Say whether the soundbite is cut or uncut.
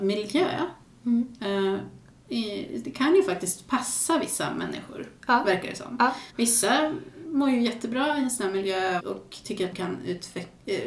cut